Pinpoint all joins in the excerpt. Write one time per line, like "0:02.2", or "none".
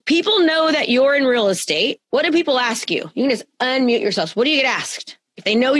0:02.0